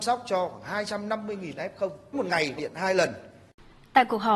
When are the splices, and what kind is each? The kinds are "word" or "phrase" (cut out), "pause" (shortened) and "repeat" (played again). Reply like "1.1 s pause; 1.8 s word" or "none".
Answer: 2.1 s word; 2.6 s word